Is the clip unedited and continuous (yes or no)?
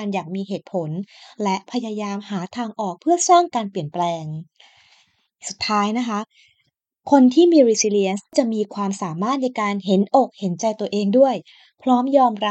yes